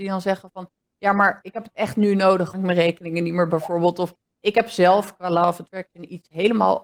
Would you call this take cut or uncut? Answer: cut